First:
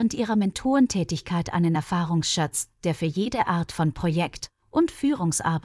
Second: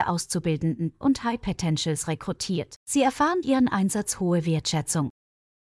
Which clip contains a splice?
second; 3 cuts; at 1.0 s, 2.8 s, 3.4 s

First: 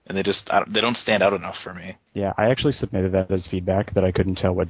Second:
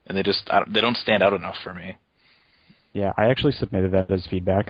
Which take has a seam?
first; 1 cut; at 2.1 s

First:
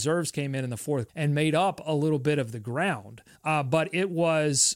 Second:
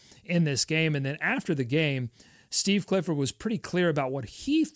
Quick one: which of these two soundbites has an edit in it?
first; 2 cuts; at 1.1 s, 3.3 s

